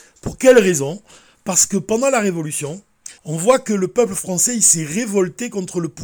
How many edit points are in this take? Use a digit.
1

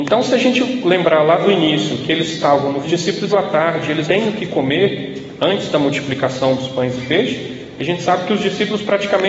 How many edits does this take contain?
3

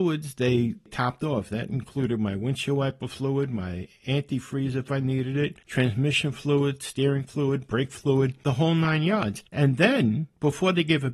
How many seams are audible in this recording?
0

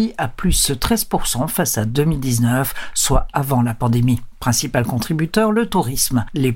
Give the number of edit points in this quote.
0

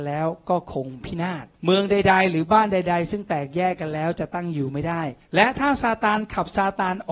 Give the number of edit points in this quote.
2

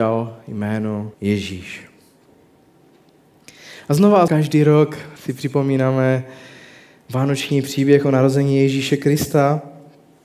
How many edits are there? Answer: 3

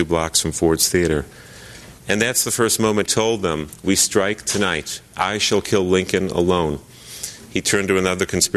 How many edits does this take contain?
2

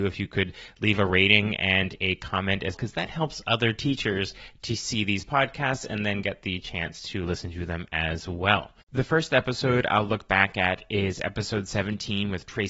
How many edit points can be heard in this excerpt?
1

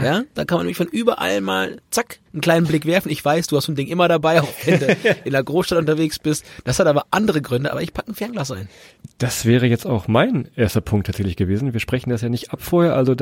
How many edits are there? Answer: 1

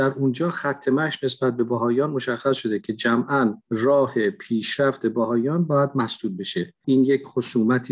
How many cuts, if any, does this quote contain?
2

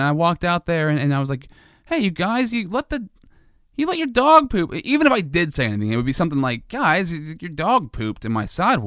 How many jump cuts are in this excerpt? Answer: 0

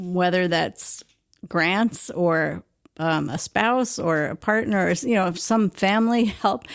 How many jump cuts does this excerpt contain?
0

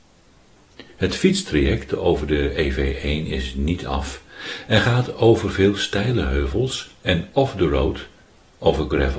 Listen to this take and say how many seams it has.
0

